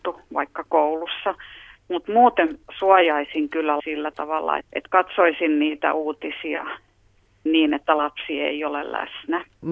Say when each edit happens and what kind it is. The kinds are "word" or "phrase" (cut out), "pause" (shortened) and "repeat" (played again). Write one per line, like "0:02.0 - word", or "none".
0:03.8 - word
0:04.6 - word
0:07.5 - word